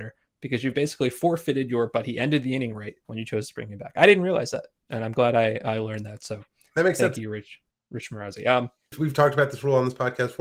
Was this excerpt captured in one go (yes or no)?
no